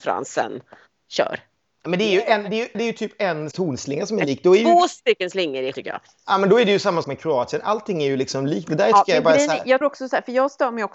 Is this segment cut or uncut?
cut